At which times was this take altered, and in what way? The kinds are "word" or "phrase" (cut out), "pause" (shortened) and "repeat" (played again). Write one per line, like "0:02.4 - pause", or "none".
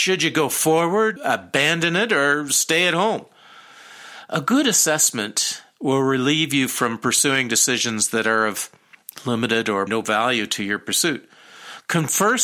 0:01.2 - word
0:09.9 - word